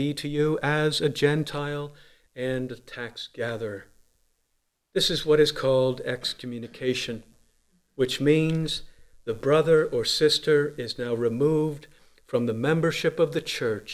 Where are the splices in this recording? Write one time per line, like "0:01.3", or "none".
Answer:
none